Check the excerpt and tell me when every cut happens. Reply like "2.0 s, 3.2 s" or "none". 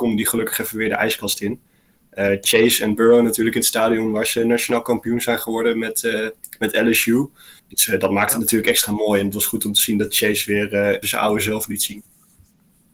7.6 s, 11.0 s